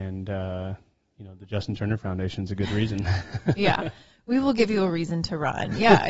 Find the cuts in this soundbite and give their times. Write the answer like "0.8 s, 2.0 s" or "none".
none